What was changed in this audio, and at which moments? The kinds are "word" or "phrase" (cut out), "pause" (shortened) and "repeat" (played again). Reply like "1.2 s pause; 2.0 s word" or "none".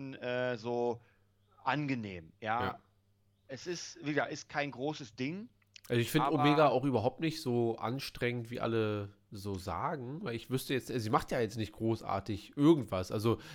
none